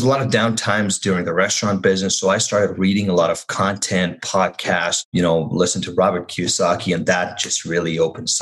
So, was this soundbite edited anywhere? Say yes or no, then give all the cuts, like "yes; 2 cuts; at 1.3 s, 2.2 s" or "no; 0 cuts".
no; 0 cuts